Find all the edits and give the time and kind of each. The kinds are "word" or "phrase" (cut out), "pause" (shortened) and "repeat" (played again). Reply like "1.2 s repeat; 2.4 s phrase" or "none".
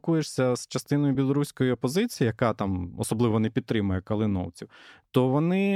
none